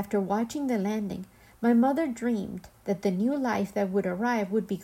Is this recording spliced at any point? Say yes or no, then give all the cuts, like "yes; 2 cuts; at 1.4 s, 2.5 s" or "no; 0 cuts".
no; 0 cuts